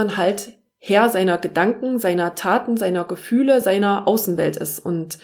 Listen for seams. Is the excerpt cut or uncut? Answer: uncut